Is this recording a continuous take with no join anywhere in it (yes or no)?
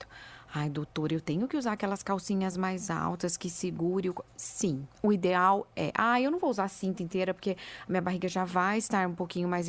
no